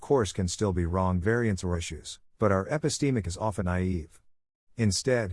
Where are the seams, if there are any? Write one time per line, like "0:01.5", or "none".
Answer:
0:01.2
0:01.7
0:02.3
0:03.2
0:03.6